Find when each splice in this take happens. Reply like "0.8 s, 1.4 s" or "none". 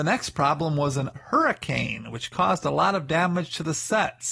1.2 s